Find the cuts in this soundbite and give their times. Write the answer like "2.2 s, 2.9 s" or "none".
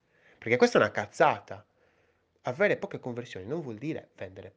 none